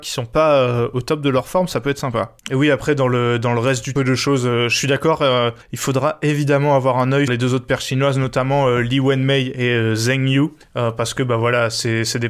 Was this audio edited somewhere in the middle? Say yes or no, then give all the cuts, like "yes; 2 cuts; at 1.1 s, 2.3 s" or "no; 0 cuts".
yes; 5 cuts; at 2.4 s, 4.0 s, 5.6 s, 7.3 s, 10.6 s